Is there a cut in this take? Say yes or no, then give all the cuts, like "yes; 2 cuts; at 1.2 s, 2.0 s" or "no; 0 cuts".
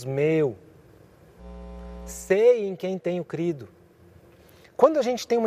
no; 0 cuts